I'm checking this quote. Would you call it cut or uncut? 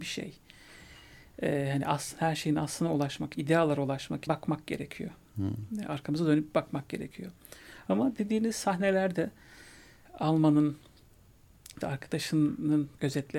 cut